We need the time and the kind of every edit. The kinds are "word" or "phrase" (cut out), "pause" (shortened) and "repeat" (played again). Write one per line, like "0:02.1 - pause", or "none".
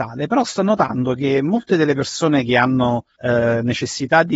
0:03.2 - pause